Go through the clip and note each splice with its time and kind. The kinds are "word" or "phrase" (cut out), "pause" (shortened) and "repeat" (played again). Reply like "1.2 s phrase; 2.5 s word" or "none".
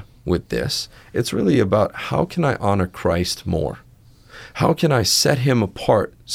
none